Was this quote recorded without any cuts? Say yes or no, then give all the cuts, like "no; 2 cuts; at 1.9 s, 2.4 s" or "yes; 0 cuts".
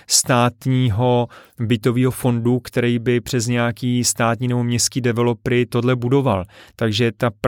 yes; 0 cuts